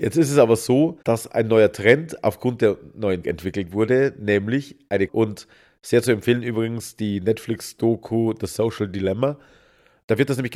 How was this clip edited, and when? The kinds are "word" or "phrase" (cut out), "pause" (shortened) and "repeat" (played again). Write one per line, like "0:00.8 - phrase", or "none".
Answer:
0:01.0 - pause
0:03.2 - word
0:05.1 - word